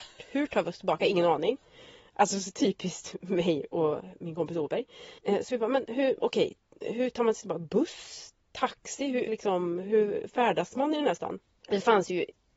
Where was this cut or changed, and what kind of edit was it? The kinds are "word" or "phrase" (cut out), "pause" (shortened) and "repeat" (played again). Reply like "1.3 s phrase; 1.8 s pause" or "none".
5.2 s pause; 9.3 s word